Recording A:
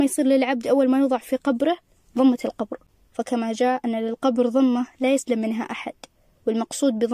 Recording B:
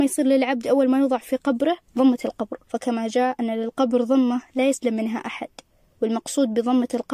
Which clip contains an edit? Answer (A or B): B